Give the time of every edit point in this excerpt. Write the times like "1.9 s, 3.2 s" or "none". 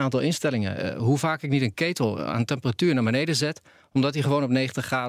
none

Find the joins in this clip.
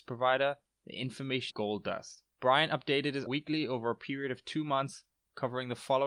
1.5 s, 2.3 s, 3.3 s

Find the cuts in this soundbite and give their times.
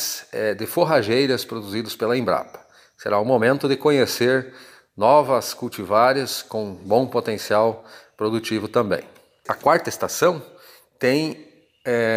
none

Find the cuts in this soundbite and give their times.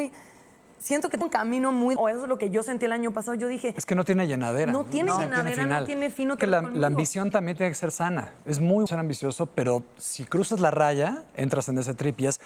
1.2 s, 2.0 s, 6.4 s, 8.9 s

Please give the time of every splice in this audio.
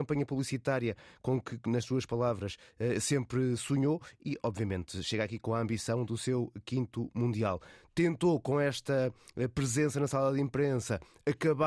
none

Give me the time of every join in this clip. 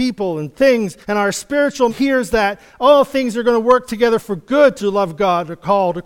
1.0 s, 1.9 s, 4.8 s

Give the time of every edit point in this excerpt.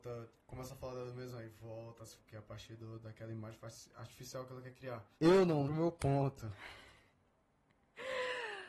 2.2 s, 5.1 s, 5.7 s

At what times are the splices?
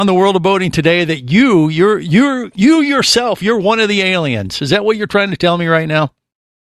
none

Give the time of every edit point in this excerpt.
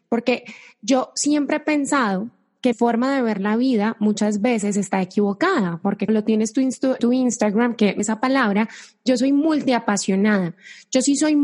2.7 s, 6.1 s, 7.0 s, 8.0 s

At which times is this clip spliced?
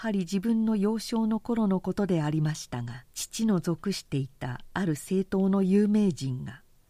3.1 s

